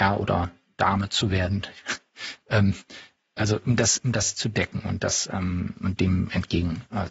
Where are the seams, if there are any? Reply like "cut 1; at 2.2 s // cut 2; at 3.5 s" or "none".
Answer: none